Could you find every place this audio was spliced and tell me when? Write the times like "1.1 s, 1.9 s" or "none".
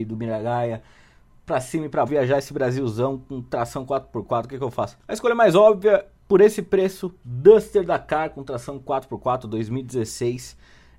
2.1 s, 5.0 s

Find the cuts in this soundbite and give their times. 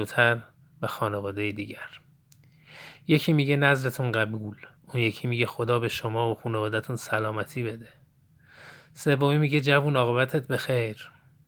4.8 s

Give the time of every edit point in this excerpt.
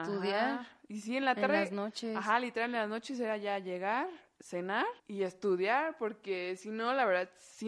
5.0 s

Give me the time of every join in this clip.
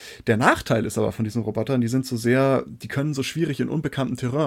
none

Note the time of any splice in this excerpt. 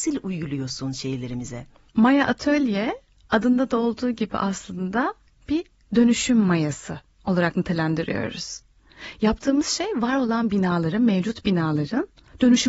none

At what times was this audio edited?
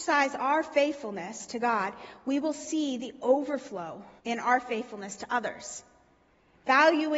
4.2 s

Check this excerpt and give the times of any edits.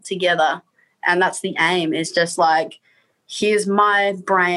none

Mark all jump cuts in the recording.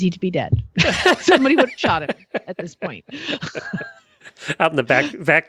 none

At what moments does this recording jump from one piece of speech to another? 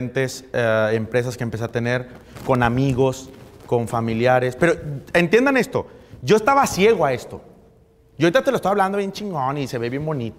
none

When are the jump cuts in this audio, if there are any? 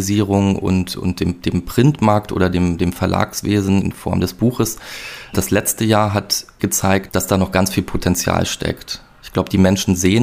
6.6 s

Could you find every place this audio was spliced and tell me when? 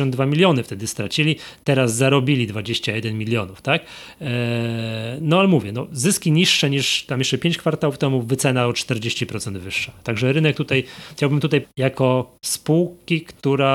11.6 s

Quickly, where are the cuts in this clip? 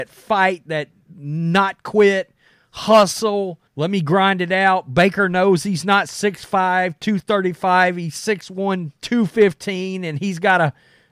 3.7 s, 9.0 s

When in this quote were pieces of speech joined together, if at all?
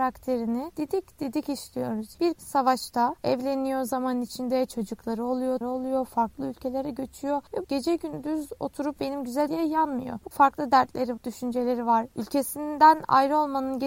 2.4 s, 5.6 s, 7.6 s, 9.0 s, 9.5 s, 10.3 s, 11.2 s

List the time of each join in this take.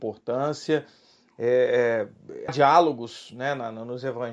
2.5 s

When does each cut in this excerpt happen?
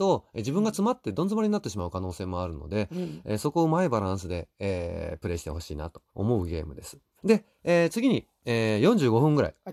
6.1 s, 7.2 s

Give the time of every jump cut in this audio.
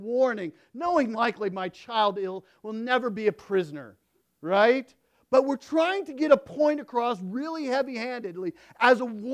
1.1 s, 4.2 s

